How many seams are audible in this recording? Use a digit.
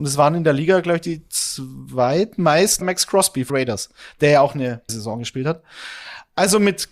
3